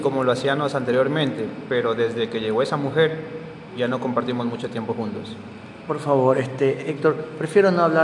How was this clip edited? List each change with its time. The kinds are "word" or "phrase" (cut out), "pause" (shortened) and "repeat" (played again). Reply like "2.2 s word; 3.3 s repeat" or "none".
none